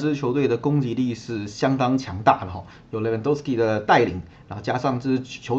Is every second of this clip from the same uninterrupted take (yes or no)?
yes